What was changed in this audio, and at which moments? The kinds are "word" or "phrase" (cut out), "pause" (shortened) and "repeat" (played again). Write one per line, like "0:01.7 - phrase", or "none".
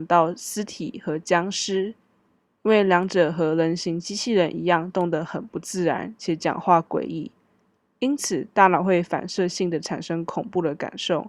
none